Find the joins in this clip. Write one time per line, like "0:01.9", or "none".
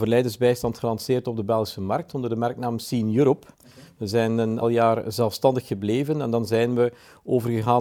0:03.5
0:04.6